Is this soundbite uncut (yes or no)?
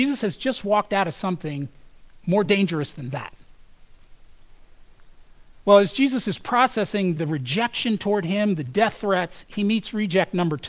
yes